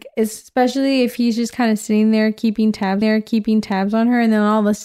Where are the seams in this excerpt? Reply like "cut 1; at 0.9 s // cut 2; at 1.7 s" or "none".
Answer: cut 1; at 3.0 s